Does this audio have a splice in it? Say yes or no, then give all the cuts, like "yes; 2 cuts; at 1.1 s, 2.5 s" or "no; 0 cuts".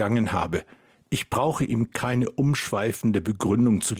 no; 0 cuts